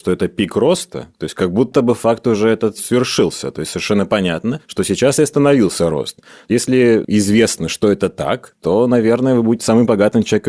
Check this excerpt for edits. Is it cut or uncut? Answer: uncut